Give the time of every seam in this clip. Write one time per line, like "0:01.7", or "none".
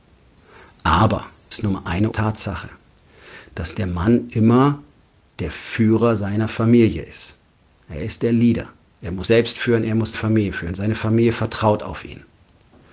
0:01.5
0:02.1
0:09.3
0:10.1